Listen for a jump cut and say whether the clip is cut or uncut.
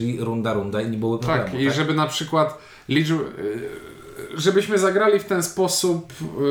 uncut